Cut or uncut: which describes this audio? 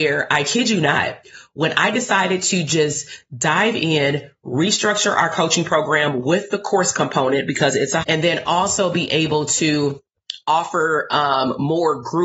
cut